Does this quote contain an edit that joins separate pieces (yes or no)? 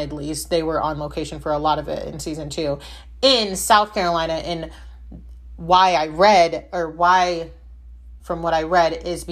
no